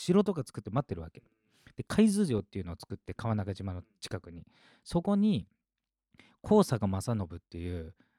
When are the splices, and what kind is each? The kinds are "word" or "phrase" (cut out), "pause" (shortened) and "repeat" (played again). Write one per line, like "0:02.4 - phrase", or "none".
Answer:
none